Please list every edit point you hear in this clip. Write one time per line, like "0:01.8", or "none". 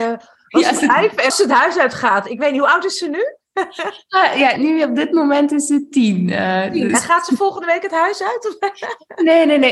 0:01.3
0:04.6